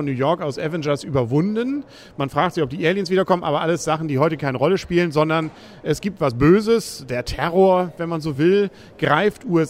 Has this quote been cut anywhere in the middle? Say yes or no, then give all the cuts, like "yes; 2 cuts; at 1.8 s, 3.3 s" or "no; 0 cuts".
no; 0 cuts